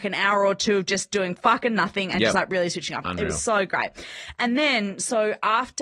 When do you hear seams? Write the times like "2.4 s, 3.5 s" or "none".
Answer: none